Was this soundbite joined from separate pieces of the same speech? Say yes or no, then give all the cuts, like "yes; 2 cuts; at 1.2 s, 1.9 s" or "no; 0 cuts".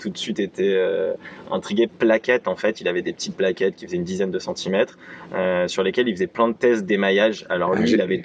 yes; 1 cut; at 1.9 s